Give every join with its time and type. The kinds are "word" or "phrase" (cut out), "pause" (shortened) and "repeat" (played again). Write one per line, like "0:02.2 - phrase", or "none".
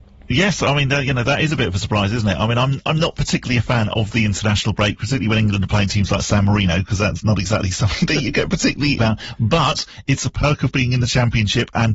0:09.0 - word